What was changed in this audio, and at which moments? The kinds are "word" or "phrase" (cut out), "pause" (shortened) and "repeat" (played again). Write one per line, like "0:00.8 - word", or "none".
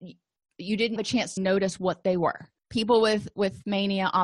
0:01.0 - word
0:01.4 - word
0:02.6 - pause